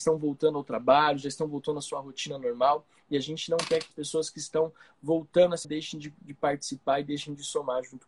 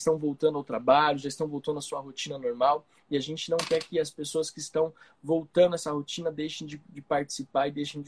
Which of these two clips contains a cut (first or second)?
first